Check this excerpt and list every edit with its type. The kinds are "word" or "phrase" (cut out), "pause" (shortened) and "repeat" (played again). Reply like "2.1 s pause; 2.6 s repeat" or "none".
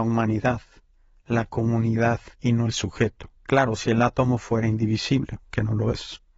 2.3 s pause; 3.3 s pause